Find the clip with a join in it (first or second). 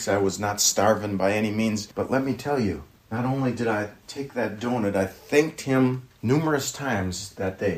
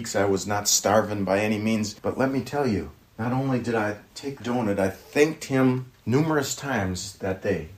second